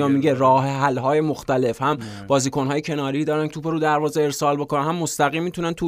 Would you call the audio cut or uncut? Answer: cut